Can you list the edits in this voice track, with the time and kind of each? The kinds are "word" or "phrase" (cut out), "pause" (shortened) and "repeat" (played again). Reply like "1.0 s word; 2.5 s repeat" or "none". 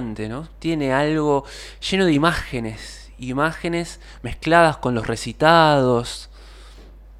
none